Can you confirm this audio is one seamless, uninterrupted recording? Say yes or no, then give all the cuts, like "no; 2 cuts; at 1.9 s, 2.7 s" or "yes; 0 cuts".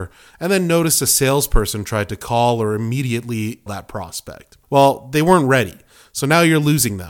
no; 2 cuts; at 3.7 s, 4.6 s